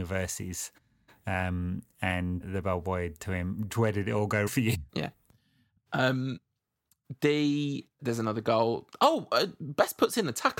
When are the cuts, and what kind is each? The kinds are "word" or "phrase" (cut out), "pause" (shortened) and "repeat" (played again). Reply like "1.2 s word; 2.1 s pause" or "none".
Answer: 2.4 s word; 3.2 s word; 3.7 s word; 4.5 s word; 4.9 s pause; 8.0 s word